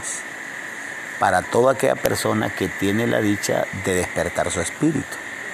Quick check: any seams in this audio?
no; 0 cuts

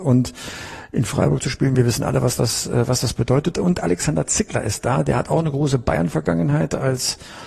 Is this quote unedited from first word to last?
yes; 0 cuts

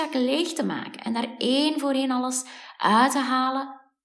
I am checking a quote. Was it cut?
no; 0 cuts

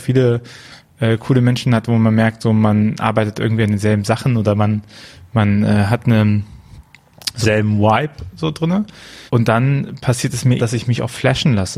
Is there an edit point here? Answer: yes; 3 cuts; at 7.4 s, 9.3 s, 10.6 s

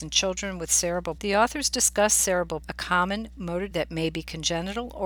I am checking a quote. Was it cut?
yes; 3 cuts; at 1.2 s, 2.6 s, 3.7 s

